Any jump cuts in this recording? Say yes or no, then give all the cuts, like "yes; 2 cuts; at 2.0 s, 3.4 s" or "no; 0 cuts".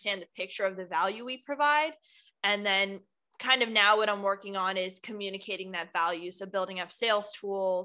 no; 0 cuts